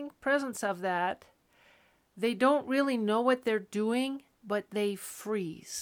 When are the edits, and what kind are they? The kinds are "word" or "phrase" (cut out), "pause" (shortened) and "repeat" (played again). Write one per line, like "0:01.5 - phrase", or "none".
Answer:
0:04.3 - pause